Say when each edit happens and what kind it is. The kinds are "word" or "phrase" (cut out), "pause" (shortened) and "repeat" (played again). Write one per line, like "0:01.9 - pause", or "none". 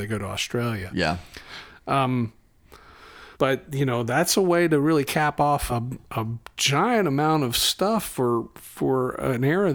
0:03.3 - pause
0:05.7 - word